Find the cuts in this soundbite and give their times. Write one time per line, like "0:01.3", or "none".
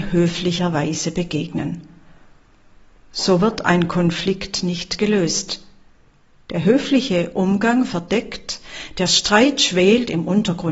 none